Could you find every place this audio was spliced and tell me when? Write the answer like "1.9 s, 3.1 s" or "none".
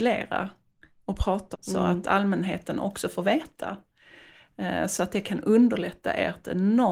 1.5 s

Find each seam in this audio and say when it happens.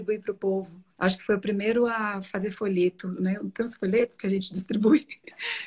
0.9 s

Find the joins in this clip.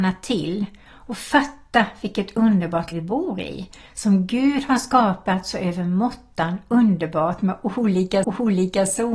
2.9 s, 8.2 s

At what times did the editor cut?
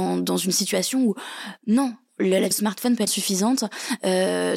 2.5 s, 3.1 s

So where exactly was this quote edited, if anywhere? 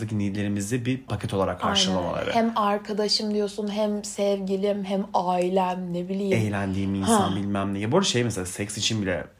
1.1 s

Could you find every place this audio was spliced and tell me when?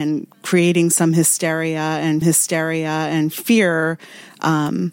2.2 s

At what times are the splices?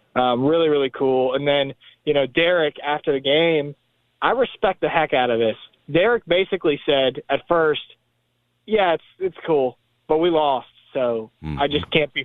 none

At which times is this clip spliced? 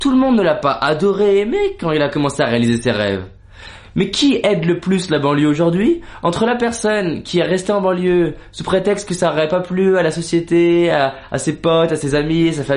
none

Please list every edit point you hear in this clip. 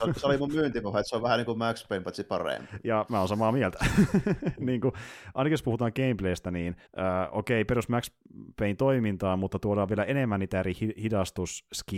6.9 s

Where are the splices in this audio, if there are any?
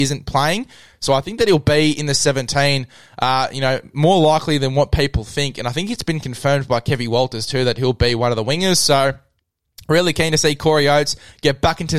none

